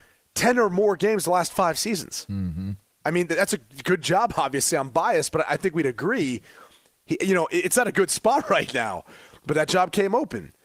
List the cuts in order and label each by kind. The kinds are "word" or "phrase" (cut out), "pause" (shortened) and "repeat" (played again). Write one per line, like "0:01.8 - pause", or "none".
none